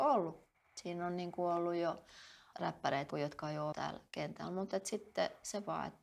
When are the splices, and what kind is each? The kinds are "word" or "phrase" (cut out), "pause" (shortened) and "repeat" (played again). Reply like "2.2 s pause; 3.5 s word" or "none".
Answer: 2.5 s word; 3.1 s word; 3.7 s word